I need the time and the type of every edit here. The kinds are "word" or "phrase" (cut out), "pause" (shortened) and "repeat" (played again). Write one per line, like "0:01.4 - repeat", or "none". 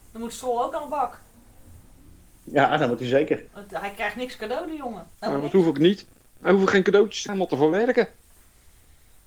0:03.5 - pause
0:05.1 - pause
0:07.3 - word